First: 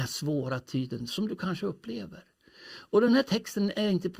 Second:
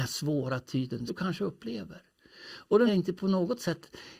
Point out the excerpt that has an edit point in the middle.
second; 2 cuts; at 1.1 s, 2.9 s

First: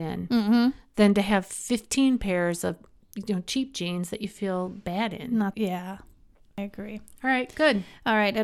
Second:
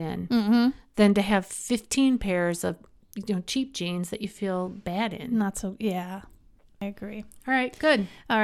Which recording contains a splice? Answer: first; 1 cut; at 5.5 s

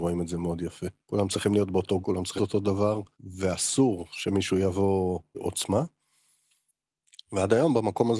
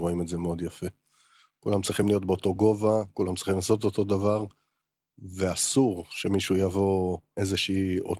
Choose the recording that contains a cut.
first; 5 cuts; at 1.0 s, 2.0 s, 2.4 s, 3.1 s, 5.3 s

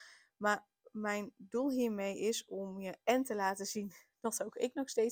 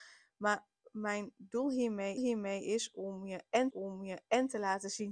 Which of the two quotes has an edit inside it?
second; 2 cuts; at 2.2 s, 3.7 s

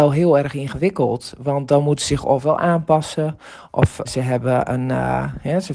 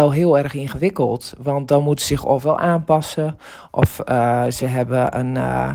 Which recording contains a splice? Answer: first; 1 cut; at 4.0 s

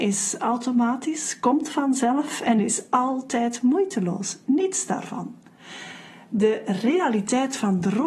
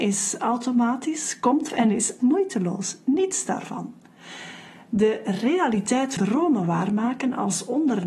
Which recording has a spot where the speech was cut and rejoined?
second; 3 cuts; at 1.7 s, 2.2 s, 6.2 s

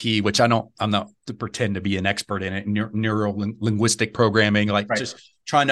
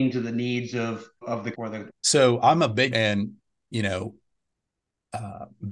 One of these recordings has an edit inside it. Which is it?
second; 4 cuts; at 1.2 s, 1.5 s, 1.9 s, 2.9 s

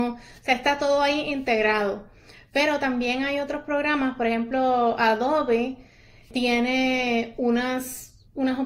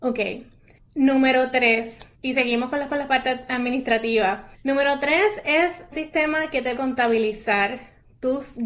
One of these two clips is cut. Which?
second; 5 cuts; at 2.1 s, 2.9 s, 4.5 s, 5.9 s, 6.8 s

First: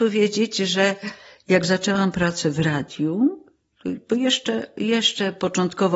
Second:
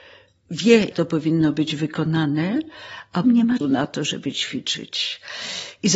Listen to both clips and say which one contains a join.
second; 3 cuts; at 0.9 s, 3.2 s, 3.6 s

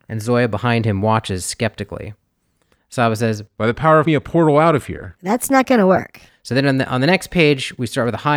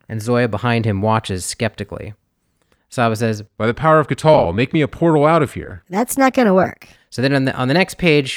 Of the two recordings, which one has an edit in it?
first; 1 cut; at 4.1 s

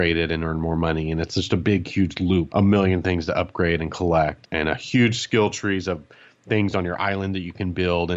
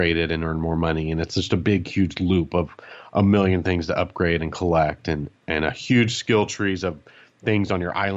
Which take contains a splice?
first; 2 cuts; at 2.5 s, 4.4 s

